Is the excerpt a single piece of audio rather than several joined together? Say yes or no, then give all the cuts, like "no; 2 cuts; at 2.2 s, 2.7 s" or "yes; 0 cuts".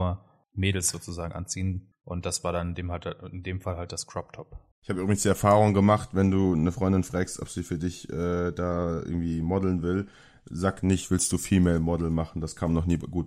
yes; 0 cuts